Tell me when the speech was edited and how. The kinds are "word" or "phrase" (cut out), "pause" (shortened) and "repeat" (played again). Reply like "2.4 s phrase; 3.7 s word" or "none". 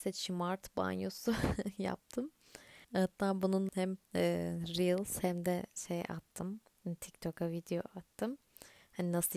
2.8 s pause; 3.7 s word; 4.0 s pause